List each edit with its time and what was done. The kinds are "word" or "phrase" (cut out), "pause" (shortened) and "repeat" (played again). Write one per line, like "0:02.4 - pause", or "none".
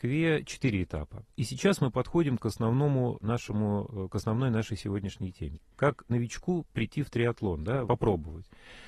0:01.3 - pause
0:07.8 - word